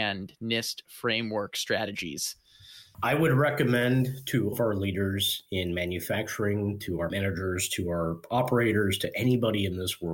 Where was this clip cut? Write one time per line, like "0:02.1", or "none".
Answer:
0:04.5
0:07.1